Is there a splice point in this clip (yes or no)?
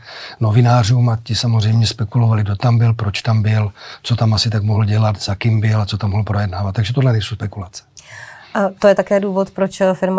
no